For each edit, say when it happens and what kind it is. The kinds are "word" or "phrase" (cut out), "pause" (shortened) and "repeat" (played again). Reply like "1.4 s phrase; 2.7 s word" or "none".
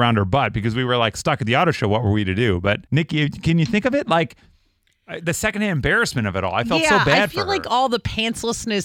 2.9 s pause